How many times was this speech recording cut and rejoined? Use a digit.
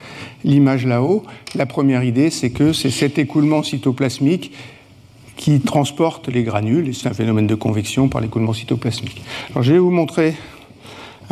1